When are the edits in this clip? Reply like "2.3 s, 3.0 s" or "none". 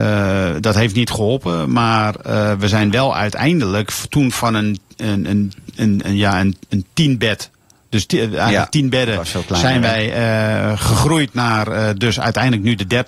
none